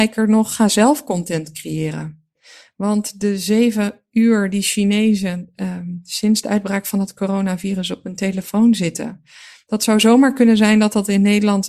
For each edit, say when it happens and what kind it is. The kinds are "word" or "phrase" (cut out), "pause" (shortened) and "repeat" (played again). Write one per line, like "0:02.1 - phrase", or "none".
none